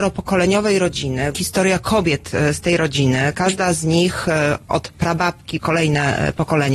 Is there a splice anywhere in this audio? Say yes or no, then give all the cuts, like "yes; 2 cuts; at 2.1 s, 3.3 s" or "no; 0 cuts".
yes; 2 cuts; at 1.3 s, 5.6 s